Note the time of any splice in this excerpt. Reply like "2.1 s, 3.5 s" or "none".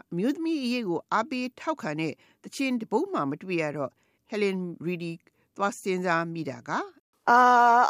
none